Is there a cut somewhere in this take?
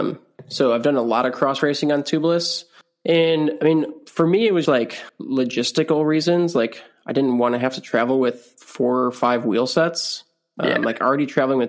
yes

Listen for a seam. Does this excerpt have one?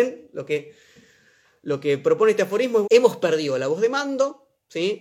yes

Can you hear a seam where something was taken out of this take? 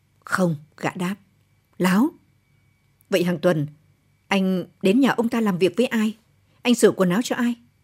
no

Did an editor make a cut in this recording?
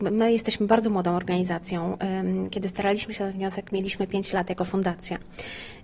no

